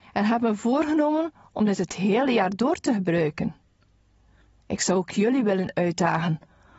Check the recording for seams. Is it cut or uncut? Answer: uncut